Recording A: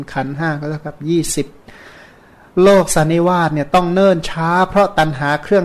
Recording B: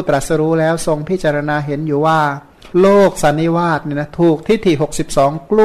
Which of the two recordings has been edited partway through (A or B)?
B